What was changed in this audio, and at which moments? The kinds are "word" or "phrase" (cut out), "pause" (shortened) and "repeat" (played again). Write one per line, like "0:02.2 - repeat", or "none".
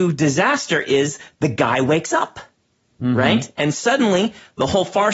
none